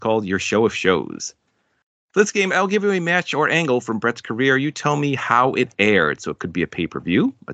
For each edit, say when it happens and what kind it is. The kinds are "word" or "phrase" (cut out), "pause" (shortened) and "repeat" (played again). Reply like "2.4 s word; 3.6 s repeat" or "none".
none

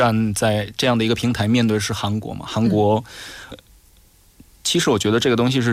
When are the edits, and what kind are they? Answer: 3.5 s word

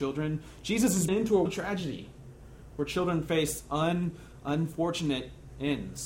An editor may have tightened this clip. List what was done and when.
1.1 s word; 1.5 s word

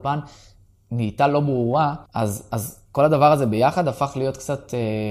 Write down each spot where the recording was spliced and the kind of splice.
2.1 s pause

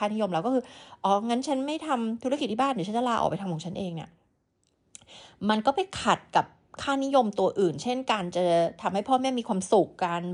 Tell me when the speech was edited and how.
none

